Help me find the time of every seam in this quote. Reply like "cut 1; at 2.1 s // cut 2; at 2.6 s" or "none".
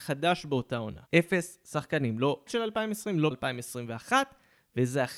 cut 1; at 1.1 s // cut 2; at 2.5 s // cut 3; at 3.3 s